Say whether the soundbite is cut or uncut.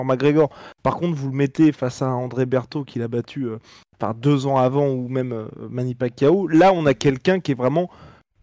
uncut